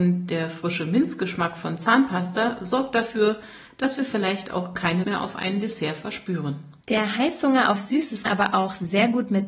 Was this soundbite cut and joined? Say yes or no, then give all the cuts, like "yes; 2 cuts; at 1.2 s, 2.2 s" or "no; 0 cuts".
yes; 3 cuts; at 5.0 s, 6.8 s, 8.3 s